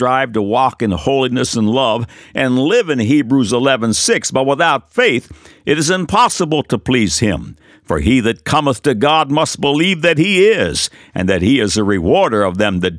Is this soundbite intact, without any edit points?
yes; 0 cuts

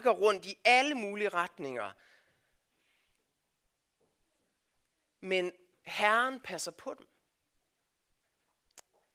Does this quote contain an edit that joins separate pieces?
no; 0 cuts

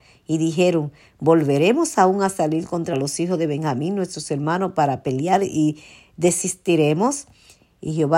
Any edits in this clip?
no; 0 cuts

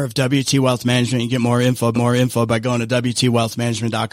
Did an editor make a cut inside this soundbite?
yes; 1 cut; at 1.9 s

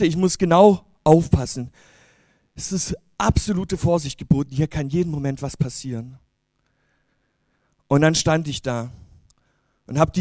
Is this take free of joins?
yes; 0 cuts

